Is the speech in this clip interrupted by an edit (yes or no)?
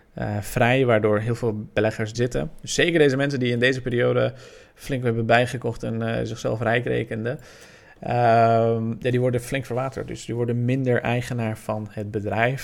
yes